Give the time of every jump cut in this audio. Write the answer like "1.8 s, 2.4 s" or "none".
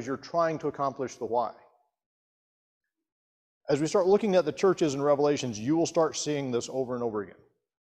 none

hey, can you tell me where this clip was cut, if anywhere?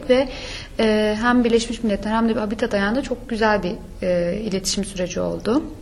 none

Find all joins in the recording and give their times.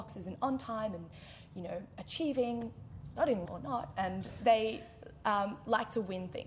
3.5 s, 4.4 s

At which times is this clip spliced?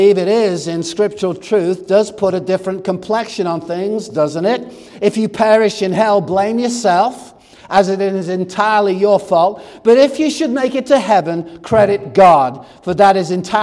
none

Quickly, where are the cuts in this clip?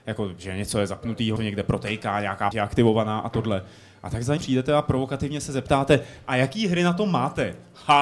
1.4 s, 2.5 s, 4.4 s

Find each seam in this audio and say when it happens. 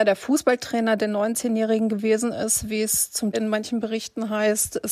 3.3 s

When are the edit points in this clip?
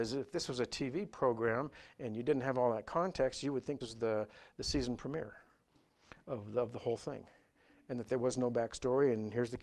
3.8 s

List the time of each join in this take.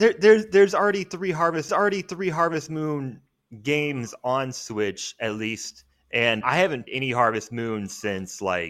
1.7 s, 6.4 s, 6.9 s

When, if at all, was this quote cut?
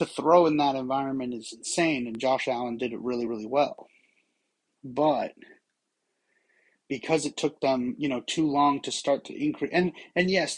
none

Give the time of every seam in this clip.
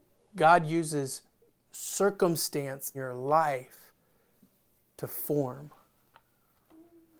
2.9 s

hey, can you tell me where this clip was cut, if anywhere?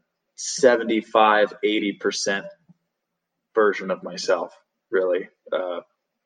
none

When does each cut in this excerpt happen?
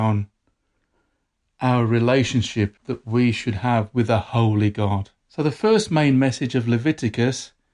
2.8 s, 5.2 s

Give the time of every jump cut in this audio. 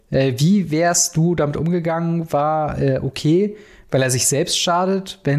none

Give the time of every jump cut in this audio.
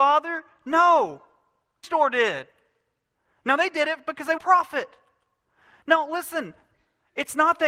1.8 s, 4.4 s

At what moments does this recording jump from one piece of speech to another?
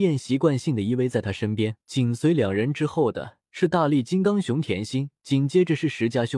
1.8 s, 3.4 s, 5.2 s

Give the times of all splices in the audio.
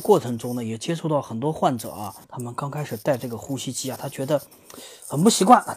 2.2 s

